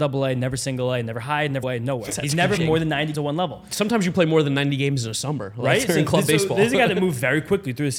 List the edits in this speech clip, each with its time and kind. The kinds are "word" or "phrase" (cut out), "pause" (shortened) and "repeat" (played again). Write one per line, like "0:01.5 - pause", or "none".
0:01.6 - word
0:02.6 - word
0:03.1 - word

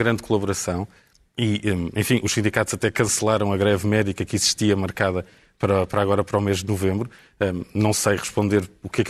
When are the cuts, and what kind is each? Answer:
none

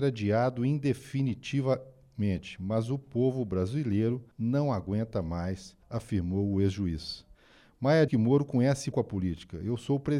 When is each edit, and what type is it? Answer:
0:04.3 - pause
0:05.8 - pause
0:08.1 - word
0:08.9 - word

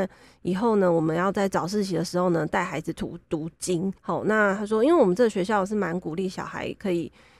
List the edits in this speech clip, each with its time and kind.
0:04.0 - pause

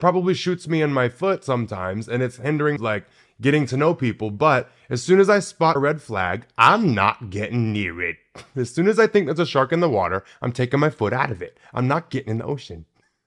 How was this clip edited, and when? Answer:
0:02.8 - phrase
0:05.8 - phrase

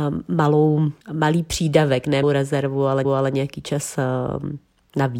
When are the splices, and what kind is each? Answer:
0:01.0 - pause
0:02.2 - word
0:03.0 - repeat

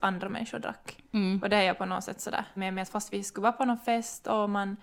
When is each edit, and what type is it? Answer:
0:02.6 - word

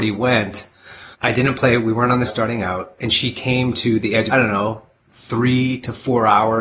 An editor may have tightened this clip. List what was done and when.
0:01.1 - pause
0:02.2 - phrase
0:04.3 - phrase

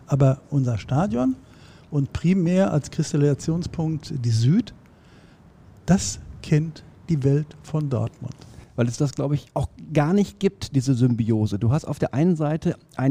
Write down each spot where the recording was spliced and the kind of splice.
0:09.5 - pause

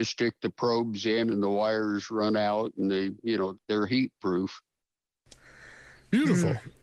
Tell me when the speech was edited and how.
0:03.5 - word

